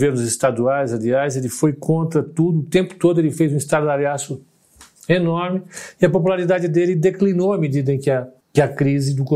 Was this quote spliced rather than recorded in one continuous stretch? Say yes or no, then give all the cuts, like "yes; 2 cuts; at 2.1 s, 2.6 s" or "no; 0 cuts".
no; 0 cuts